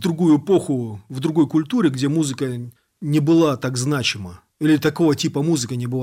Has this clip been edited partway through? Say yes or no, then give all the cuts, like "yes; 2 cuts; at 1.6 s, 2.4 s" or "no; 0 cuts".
yes; 2 cuts; at 2.8 s, 4.5 s